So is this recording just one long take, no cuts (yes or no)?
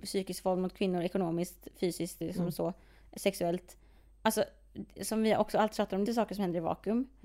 no